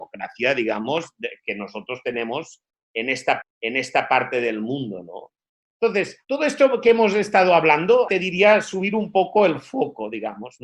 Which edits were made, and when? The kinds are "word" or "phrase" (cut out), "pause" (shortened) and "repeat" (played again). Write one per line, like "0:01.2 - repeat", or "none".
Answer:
0:03.4 - repeat
0:06.2 - pause
0:08.1 - word